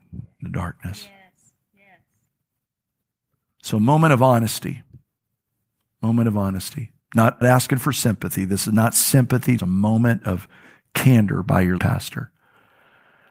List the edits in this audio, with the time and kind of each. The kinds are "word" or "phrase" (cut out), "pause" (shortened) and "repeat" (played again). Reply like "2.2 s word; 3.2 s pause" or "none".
7.4 s word; 9.6 s word; 11.8 s word